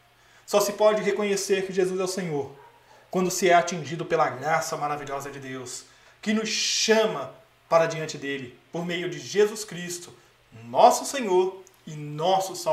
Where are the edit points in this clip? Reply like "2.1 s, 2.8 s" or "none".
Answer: none